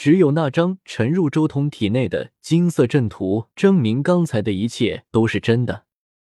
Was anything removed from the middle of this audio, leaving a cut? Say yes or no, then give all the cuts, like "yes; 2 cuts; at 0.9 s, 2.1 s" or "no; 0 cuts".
yes; 1 cut; at 3.5 s